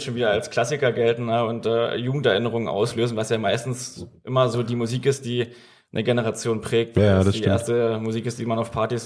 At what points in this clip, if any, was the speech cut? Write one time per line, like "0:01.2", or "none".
none